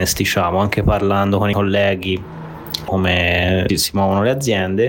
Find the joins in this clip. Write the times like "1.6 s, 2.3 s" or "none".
1.5 s, 2.9 s, 3.7 s